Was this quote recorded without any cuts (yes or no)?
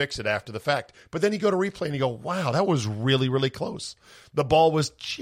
yes